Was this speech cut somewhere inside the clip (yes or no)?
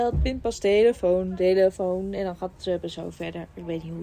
no